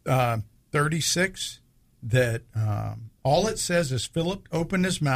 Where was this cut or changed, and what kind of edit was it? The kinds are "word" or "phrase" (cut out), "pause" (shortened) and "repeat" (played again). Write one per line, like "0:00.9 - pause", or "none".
0:01.8 - pause